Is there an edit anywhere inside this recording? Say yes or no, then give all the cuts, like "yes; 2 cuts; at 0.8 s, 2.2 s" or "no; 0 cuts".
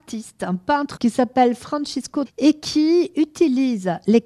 yes; 2 cuts; at 1.0 s, 2.3 s